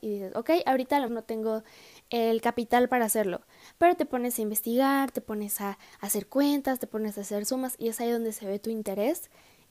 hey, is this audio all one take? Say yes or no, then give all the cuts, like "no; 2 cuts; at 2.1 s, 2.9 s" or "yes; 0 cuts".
no; 1 cut; at 1.1 s